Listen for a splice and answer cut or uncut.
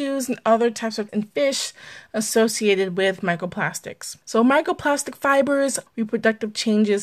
cut